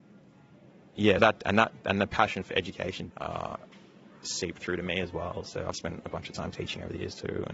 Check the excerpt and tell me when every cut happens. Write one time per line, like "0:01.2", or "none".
0:01.2
0:03.1

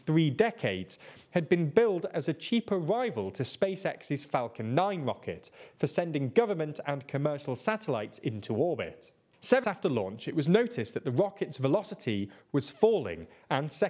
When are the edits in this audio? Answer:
0:09.6

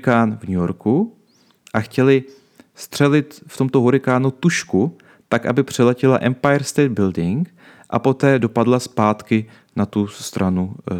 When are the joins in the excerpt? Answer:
none

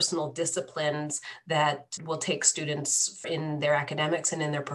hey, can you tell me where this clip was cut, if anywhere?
0:02.0
0:03.2

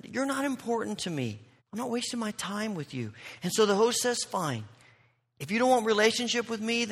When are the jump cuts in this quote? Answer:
0:01.6

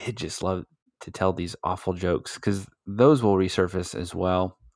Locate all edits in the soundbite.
none

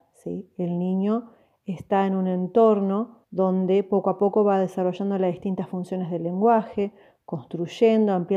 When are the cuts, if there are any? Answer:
0:03.2

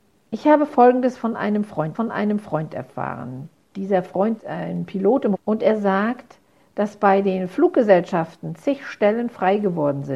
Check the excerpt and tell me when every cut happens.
0:01.9
0:04.4
0:05.3

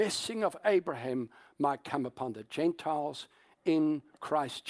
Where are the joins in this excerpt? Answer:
none

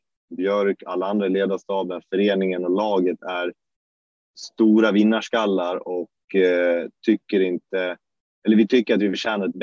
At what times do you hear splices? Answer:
none

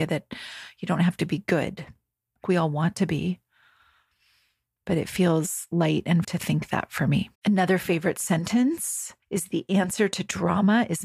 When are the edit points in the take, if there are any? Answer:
0:02.4
0:06.2
0:07.3
0:09.2

